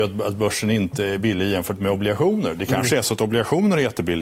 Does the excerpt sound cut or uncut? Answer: uncut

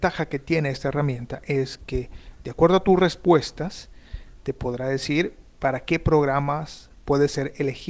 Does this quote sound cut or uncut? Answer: uncut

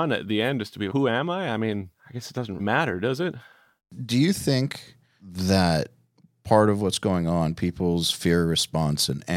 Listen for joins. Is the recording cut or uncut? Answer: cut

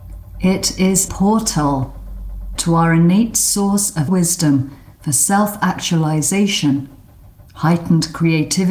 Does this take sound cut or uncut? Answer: cut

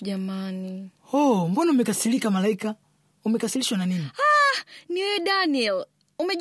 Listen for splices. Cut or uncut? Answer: uncut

